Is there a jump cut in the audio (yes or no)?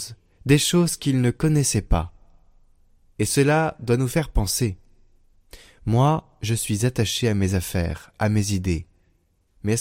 yes